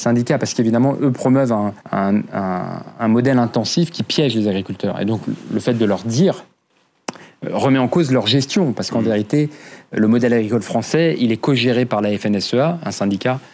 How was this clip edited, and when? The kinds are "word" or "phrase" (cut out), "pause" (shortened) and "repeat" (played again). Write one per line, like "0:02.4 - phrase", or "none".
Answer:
0:01.8 - pause